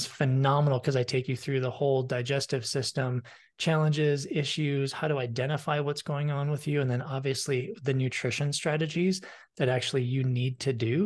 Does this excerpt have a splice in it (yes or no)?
no